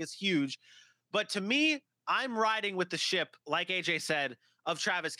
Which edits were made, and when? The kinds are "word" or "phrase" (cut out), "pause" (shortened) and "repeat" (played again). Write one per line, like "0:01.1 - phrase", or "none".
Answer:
0:03.4 - pause